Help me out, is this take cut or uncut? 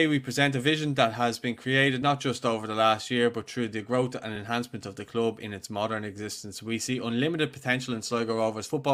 uncut